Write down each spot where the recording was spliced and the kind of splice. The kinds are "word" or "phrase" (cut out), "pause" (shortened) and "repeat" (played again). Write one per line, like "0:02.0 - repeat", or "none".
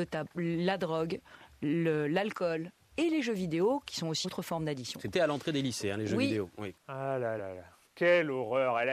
0:04.2 - word
0:05.1 - phrase
0:06.8 - pause
0:07.4 - word